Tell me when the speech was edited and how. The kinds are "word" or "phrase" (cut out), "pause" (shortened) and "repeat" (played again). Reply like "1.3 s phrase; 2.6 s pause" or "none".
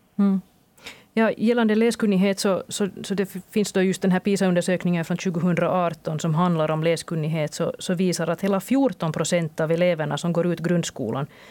none